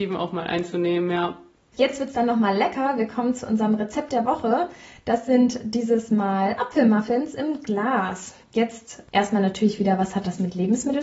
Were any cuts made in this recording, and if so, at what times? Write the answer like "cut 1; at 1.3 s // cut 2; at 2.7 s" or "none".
cut 1; at 8.4 s

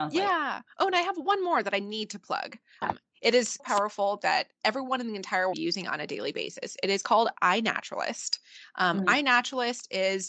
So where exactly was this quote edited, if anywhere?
cut 1; at 2.8 s // cut 2; at 3.6 s // cut 3; at 5.5 s

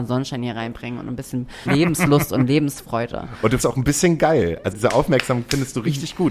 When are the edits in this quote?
cut 1; at 1.7 s // cut 2; at 3.6 s // cut 3; at 4.7 s

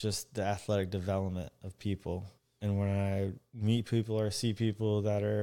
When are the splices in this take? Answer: cut 1; at 2.4 s

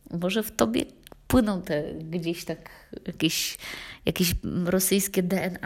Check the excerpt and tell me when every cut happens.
none

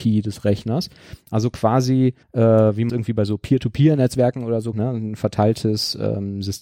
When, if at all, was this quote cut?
cut 1; at 2.2 s // cut 2; at 2.9 s // cut 3; at 4.7 s

